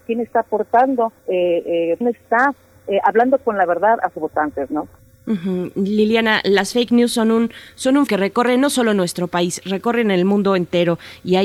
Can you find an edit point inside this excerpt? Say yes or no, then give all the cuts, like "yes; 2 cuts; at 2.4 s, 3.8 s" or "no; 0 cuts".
yes; 5 cuts; at 1.2 s, 2.0 s, 4.1 s, 5.0 s, 8.1 s